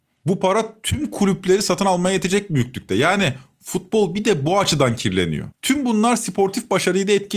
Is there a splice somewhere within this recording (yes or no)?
yes